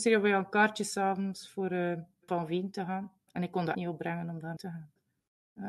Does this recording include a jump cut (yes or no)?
yes